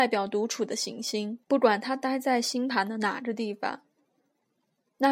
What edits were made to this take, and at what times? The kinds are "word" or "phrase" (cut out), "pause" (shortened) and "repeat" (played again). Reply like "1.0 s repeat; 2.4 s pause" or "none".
1.4 s pause

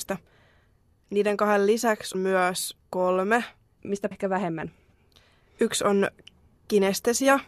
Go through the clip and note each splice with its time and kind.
2.1 s word; 4.1 s word

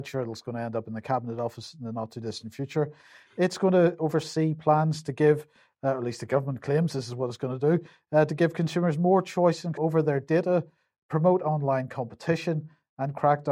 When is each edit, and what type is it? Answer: 9.8 s word

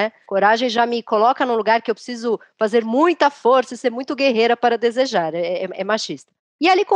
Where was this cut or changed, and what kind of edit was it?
none

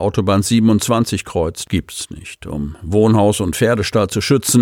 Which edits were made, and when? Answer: none

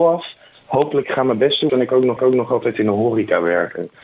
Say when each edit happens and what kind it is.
1.0 s phrase; 1.7 s phrase; 2.2 s repeat

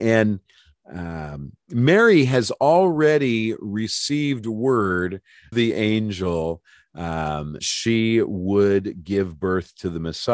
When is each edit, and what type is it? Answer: 5.5 s word; 7.6 s word

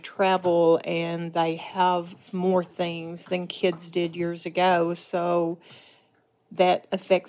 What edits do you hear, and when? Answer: none

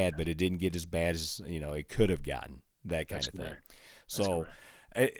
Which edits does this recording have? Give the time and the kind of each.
none

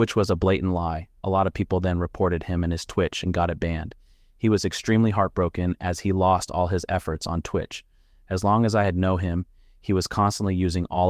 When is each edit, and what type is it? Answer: none

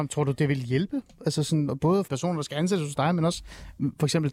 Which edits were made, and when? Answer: 2.1 s word

